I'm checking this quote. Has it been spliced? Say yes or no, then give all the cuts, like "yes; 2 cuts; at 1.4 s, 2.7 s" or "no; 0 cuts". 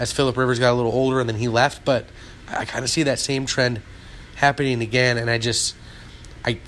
no; 0 cuts